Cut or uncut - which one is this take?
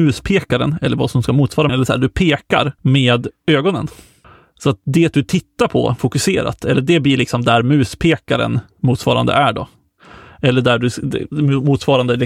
cut